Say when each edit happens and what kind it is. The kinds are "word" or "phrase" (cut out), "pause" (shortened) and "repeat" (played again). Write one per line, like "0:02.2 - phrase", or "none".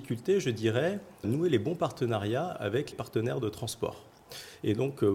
0:01.2 - word
0:02.9 - word